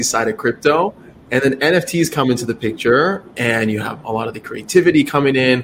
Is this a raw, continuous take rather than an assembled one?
yes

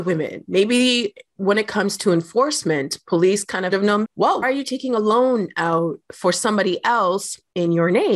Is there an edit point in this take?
yes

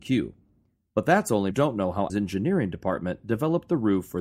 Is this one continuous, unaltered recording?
no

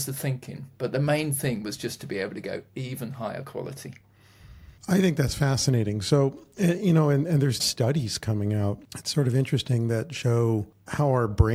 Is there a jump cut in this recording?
yes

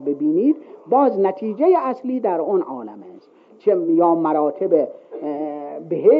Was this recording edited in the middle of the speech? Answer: no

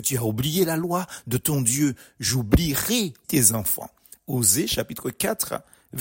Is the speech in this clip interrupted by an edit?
yes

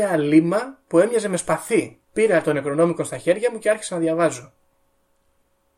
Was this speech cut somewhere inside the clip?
yes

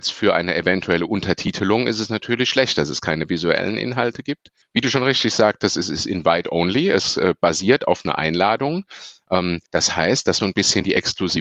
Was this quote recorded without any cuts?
no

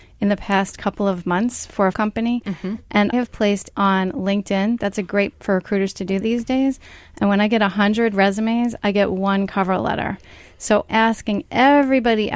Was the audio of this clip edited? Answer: yes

